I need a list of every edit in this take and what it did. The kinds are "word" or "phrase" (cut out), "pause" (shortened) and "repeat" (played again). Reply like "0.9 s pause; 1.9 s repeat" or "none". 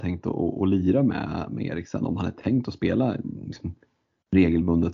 none

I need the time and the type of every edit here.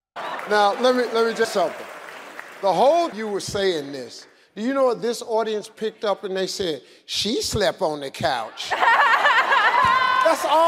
1.4 s word; 3.1 s word

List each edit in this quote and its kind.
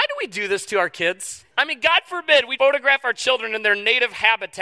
1.5 s pause; 2.6 s word

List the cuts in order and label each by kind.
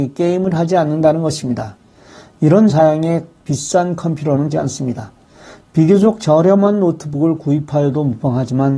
2.7 s phrase; 4.5 s word

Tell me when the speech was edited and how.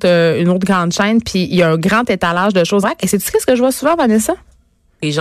2.8 s word

